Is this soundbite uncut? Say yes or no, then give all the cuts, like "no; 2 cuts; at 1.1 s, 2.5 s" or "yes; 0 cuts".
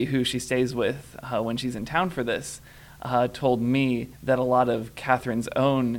no; 1 cut; at 4.1 s